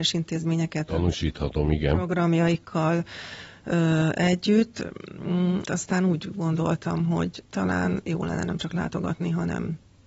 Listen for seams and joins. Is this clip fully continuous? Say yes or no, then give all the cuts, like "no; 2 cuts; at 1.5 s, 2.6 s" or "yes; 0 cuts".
no; 2 cuts; at 5.7 s, 7.4 s